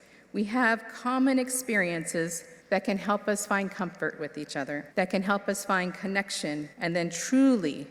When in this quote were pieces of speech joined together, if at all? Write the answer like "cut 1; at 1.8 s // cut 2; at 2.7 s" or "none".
cut 1; at 2.6 s // cut 2; at 4.9 s // cut 3; at 6.7 s